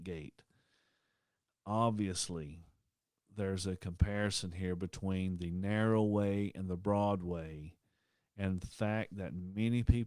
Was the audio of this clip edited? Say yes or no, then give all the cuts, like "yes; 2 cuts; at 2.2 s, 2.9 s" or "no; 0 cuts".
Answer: no; 0 cuts